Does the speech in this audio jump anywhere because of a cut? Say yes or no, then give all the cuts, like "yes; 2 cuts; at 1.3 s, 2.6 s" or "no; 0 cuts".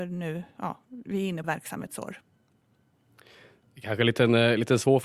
yes; 1 cut; at 1.4 s